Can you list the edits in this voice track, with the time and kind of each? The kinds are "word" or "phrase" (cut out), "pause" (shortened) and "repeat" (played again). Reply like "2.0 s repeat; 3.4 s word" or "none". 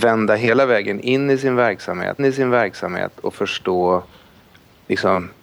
2.2 s repeat